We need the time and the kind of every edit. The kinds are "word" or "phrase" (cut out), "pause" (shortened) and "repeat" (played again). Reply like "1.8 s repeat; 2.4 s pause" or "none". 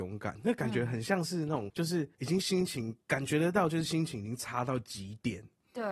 1.7 s word; 2.1 s pause; 3.0 s pause

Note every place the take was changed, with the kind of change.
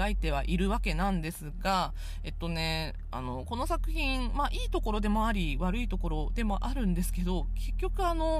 none

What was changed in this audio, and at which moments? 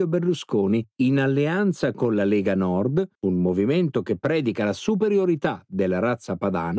0.9 s pause; 3.1 s pause

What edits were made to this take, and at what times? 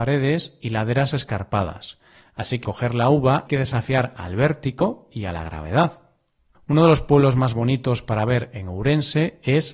2.6 s word; 3.5 s word

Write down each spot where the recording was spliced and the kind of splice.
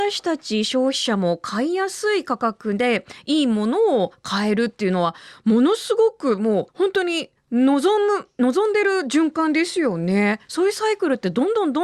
6.7 s pause; 7.4 s pause

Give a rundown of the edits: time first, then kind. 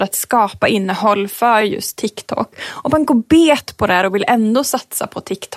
none

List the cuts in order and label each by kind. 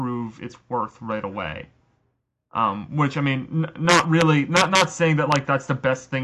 none

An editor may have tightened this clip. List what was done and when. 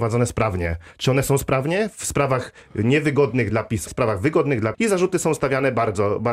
3.5 s word; 3.9 s word; 4.7 s phrase

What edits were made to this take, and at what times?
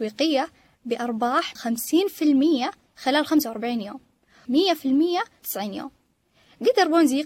1.6 s word; 4.4 s word; 5.4 s word

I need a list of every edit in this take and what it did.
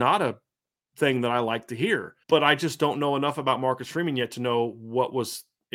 2.2 s pause

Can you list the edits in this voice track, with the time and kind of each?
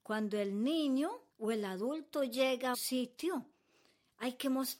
1.3 s pause; 2.7 s word

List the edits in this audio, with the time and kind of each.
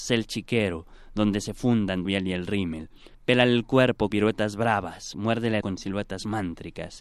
2.1 s phrase; 3.1 s pause; 4.1 s word; 5.6 s phrase

